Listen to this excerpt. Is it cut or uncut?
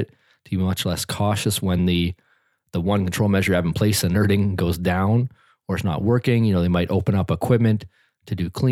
uncut